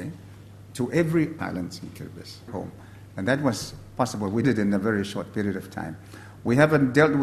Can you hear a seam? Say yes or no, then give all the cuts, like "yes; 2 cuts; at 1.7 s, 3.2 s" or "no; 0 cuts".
yes; 3 cuts; at 1.4 s, 2.5 s, 4.4 s